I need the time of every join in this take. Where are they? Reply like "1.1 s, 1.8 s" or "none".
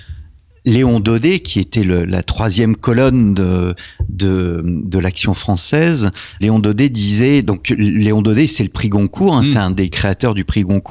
6.4 s